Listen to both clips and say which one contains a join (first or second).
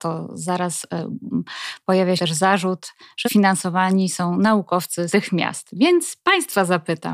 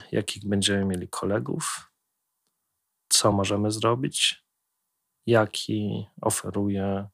first